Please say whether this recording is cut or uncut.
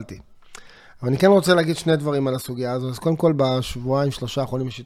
uncut